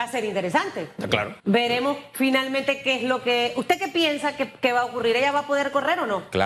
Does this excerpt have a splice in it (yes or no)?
yes